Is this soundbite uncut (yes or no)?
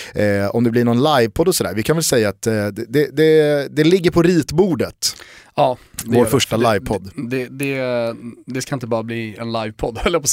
yes